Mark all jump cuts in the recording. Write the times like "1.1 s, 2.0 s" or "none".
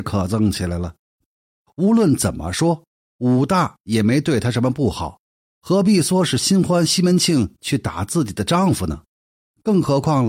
none

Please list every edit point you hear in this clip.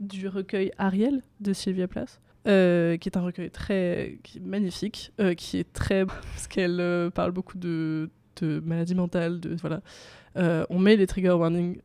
2.3 s, 6.1 s, 9.6 s

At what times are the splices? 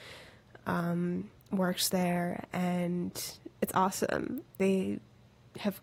1.4 s, 3.5 s, 4.5 s

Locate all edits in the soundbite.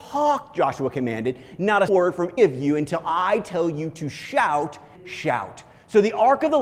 1.9 s, 2.4 s, 5.0 s

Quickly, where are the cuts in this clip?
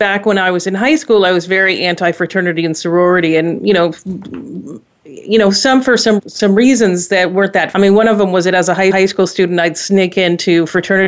6.2 s, 7.7 s, 8.9 s

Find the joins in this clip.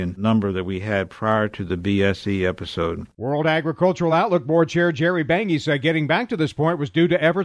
none

